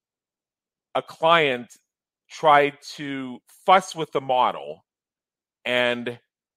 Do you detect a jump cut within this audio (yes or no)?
no